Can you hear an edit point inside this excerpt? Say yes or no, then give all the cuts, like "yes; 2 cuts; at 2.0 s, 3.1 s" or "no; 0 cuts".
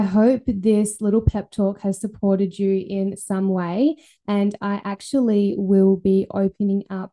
no; 0 cuts